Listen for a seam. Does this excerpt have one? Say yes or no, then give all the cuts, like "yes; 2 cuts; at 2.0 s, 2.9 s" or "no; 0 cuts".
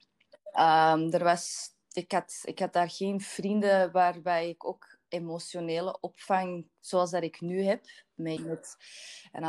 yes; 2 cuts; at 1.8 s, 8.4 s